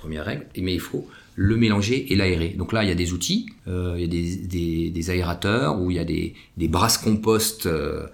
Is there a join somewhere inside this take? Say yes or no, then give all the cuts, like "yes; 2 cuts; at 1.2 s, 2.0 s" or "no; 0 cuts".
no; 0 cuts